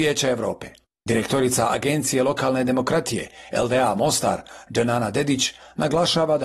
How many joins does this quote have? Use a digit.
0